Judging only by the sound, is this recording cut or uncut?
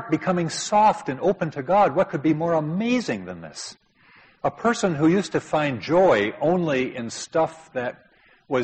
uncut